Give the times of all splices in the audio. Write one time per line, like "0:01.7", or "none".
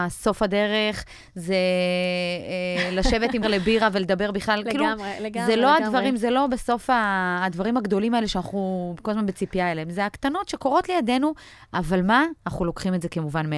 0:03.4

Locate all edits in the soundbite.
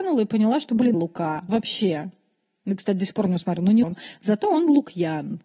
0:00.9
0:01.5
0:03.8

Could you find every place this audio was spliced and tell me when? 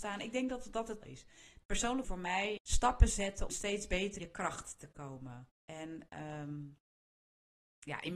0:01.0
0:02.0
0:02.6
0:03.5
0:04.2
0:05.6

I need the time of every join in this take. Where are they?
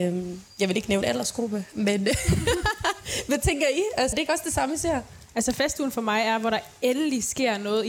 0:01.0
0:04.1

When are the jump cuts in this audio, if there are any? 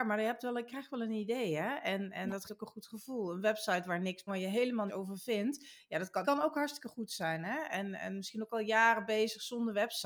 0:02.4
0:04.3
0:04.9
0:06.2

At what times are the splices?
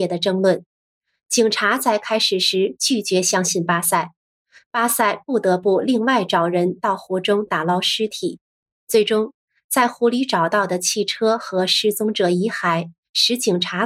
none

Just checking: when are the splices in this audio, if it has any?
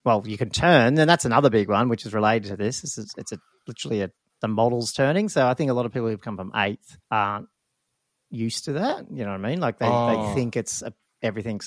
0:07.0

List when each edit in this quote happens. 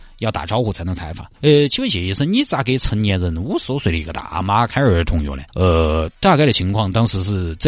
0:01.3
0:05.5

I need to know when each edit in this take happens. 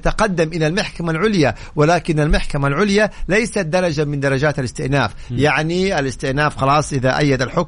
none

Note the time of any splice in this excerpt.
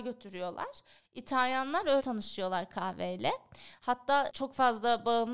0:02.0
0:04.3

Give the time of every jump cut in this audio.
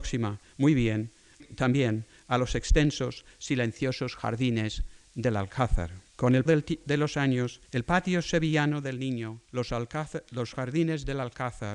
0:01.4
0:06.1
0:06.5
0:07.6
0:09.5

